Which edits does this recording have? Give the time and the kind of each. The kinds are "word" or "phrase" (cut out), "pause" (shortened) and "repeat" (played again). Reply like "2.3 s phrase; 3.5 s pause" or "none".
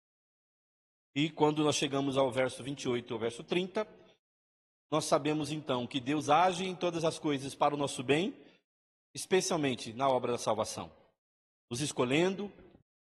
none